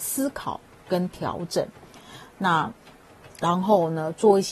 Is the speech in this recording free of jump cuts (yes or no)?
yes